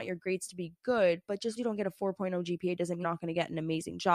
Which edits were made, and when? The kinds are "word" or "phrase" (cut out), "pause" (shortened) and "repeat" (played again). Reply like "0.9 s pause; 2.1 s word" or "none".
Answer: 1.6 s word; 3.0 s word